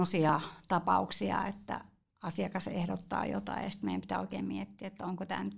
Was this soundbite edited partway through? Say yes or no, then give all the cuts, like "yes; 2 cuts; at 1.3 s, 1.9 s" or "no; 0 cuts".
no; 0 cuts